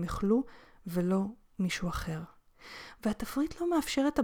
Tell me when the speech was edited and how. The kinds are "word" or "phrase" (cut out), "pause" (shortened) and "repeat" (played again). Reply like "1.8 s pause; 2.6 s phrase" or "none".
none